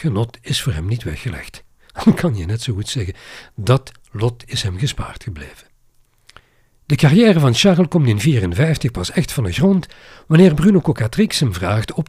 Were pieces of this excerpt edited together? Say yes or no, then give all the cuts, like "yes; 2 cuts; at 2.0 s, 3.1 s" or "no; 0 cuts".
no; 0 cuts